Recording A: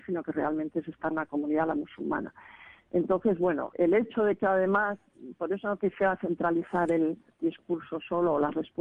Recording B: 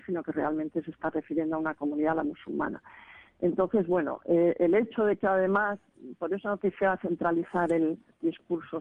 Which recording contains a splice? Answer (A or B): A